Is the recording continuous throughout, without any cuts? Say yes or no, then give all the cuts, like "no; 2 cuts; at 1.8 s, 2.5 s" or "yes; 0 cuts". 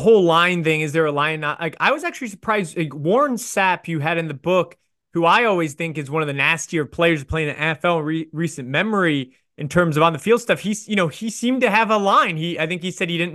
yes; 0 cuts